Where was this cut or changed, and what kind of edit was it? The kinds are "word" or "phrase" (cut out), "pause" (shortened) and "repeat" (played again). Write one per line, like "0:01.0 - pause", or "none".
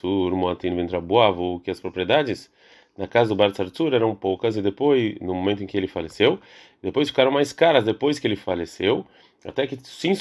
none